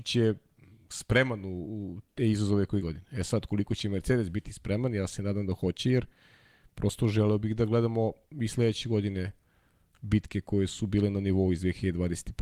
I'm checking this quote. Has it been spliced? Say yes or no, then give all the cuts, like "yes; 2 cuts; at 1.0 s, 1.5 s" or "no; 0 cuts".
yes; 1 cut; at 2.8 s